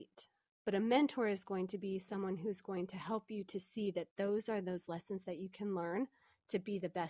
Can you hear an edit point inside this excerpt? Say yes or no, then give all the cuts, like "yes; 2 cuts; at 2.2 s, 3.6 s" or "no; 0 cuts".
no; 0 cuts